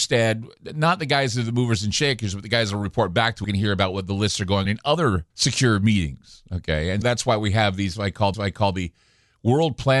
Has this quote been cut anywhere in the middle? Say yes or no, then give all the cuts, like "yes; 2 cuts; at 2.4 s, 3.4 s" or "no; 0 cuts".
yes; 5 cuts; at 3.4 s, 4.7 s, 5.3 s, 7.0 s, 8.3 s